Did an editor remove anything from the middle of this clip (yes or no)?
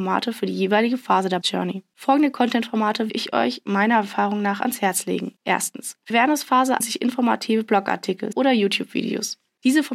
yes